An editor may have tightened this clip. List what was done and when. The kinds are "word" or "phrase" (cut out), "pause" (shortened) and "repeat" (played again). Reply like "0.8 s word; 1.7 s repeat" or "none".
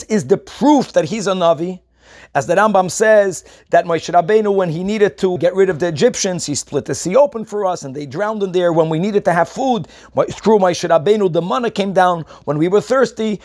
5.4 s word